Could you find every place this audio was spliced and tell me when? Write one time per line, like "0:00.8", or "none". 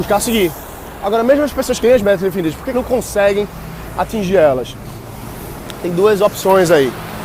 0:01.8
0:02.7